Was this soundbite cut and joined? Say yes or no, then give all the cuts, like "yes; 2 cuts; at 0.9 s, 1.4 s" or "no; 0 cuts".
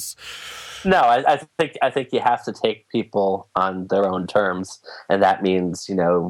no; 0 cuts